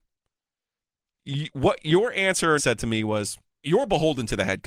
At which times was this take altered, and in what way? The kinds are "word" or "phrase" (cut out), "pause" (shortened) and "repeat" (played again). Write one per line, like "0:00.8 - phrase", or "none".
0:02.6 - word
0:03.6 - word